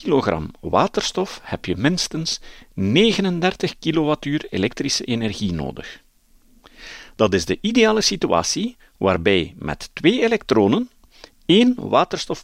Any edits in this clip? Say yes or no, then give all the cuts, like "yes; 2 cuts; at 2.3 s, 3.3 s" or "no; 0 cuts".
no; 0 cuts